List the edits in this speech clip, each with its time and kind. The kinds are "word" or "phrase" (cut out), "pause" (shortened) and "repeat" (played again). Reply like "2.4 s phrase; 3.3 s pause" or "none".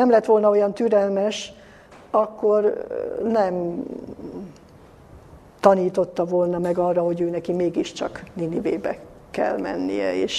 none